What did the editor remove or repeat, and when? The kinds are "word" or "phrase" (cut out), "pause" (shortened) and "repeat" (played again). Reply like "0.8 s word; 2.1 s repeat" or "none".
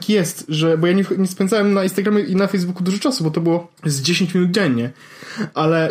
3.8 s pause